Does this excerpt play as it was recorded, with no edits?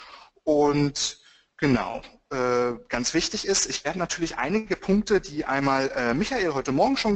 yes; 0 cuts

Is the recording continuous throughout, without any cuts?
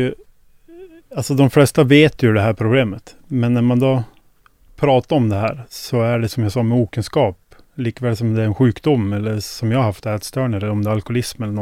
no; 1 cut; at 6.3 s

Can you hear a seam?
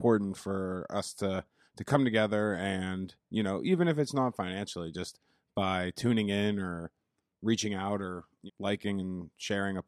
yes; 1 cut; at 8.5 s

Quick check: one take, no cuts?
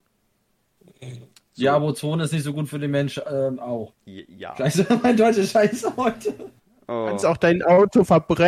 yes; 0 cuts

